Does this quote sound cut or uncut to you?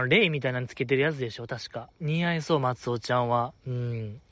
cut